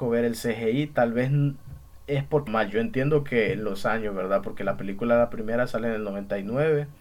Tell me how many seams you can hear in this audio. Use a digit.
1